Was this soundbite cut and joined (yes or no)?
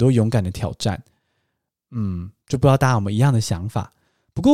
no